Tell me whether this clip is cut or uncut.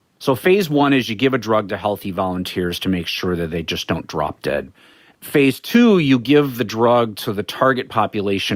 uncut